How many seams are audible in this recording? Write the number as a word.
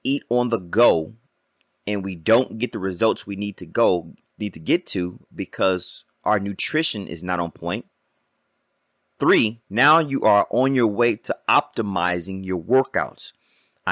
two